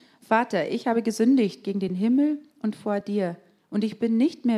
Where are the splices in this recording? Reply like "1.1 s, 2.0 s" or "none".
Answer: none